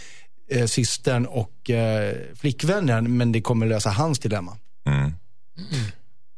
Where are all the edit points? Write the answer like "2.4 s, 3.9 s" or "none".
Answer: none